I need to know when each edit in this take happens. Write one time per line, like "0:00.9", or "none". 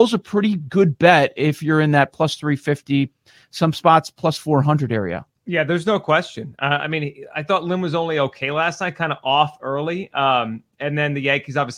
none